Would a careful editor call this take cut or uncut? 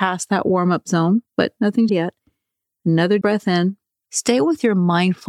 cut